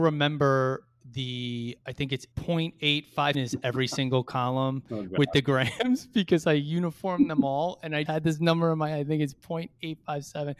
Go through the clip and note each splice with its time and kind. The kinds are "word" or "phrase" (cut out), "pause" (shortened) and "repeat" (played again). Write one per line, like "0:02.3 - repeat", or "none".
0:02.3 - word
0:03.3 - word
0:08.1 - word